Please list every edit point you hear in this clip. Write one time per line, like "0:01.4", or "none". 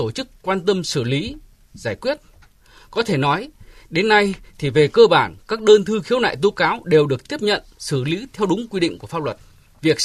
none

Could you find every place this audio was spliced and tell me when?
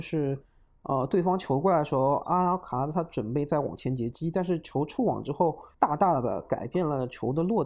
0:05.7

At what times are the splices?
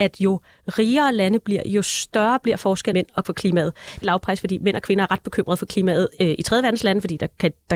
0:02.9
0:03.2
0:04.0

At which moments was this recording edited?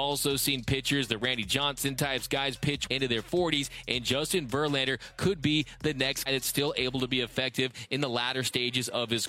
0:02.9
0:06.3

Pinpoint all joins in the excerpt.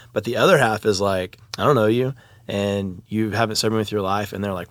none

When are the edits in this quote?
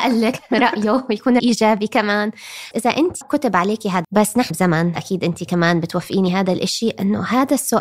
0:01.4
0:02.7
0:03.2
0:04.0
0:04.5
0:05.0

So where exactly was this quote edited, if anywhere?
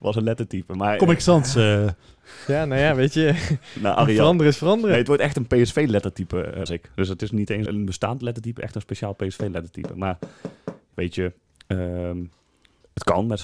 0:06.7
0:07.7
0:10.9

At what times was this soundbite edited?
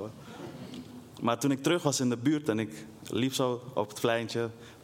none

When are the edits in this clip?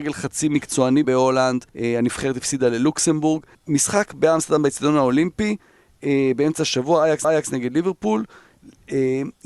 0:01.0
0:01.7
0:03.5
0:07.2

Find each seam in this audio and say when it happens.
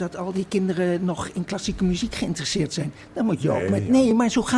none

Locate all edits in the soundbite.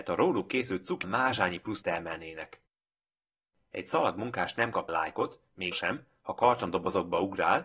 0:01.0
0:01.8
0:04.9
0:05.7

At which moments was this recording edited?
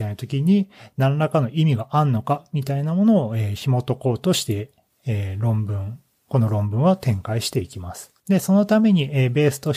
0:08.2

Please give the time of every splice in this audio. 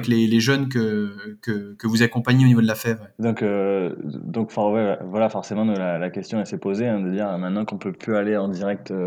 none

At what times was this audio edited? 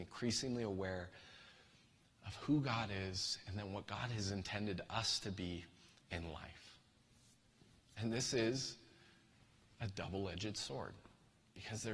none

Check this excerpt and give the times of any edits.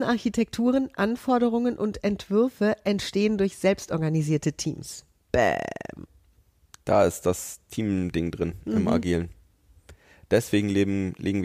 none

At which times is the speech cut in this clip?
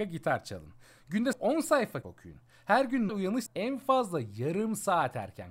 0:01.3
0:02.0
0:03.1
0:03.5

